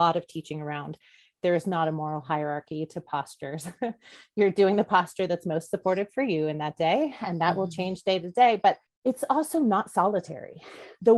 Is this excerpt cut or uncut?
uncut